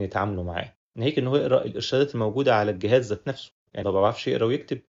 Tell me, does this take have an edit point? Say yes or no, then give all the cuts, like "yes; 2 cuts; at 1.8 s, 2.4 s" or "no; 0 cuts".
yes; 1 cut; at 3.8 s